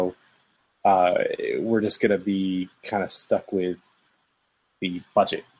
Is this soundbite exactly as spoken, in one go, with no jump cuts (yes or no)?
yes